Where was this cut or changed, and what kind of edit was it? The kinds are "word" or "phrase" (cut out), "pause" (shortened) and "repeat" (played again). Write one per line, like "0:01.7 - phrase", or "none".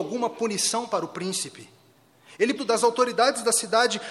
0:02.6 - phrase